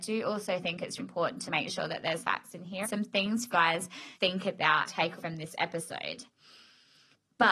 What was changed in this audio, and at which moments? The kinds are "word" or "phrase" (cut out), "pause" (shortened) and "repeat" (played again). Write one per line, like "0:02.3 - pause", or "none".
0:01.0 - word
0:01.5 - word
0:02.2 - word
0:02.8 - word
0:03.5 - word
0:04.2 - word
0:04.9 - word
0:05.2 - word